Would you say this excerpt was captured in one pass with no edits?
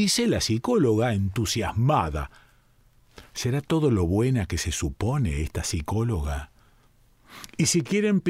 yes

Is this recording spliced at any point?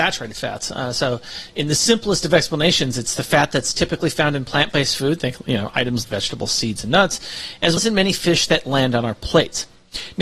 yes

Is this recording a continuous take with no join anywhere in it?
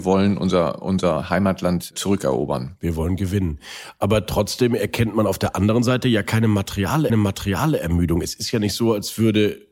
no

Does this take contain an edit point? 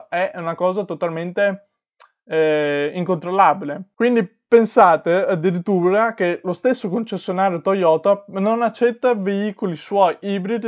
no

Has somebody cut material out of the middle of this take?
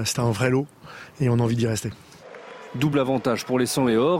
no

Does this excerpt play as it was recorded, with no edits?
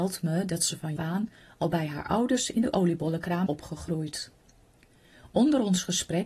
no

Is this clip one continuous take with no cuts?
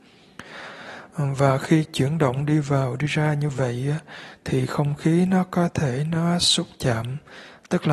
yes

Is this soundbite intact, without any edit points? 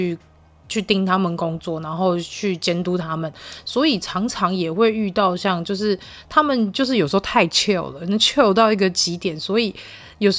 yes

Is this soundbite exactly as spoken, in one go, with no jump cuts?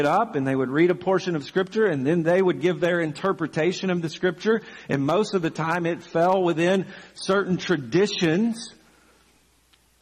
yes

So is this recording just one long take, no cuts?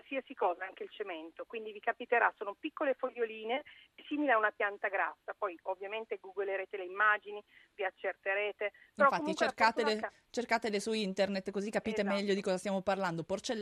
yes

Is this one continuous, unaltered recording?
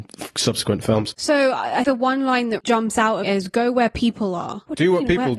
no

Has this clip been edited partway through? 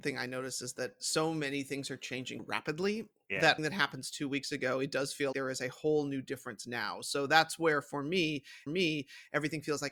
yes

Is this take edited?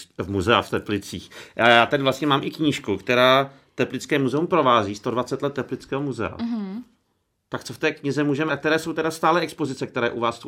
yes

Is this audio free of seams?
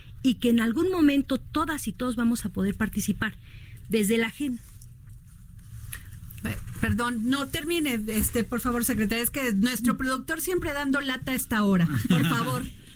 yes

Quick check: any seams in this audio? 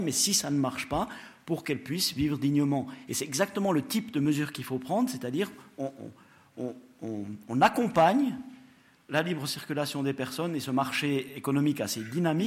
no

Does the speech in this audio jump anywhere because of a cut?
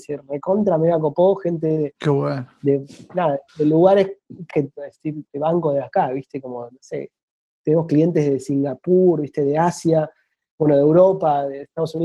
yes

